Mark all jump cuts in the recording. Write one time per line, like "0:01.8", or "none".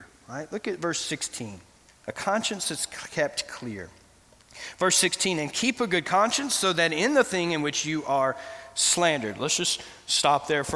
0:01.9